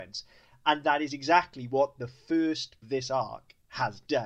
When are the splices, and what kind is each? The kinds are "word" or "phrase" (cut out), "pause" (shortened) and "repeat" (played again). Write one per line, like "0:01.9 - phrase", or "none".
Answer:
0:02.8 - phrase